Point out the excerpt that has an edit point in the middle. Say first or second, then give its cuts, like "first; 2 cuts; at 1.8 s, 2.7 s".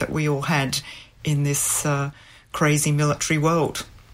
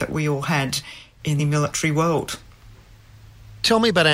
second; 1 cut; at 1.4 s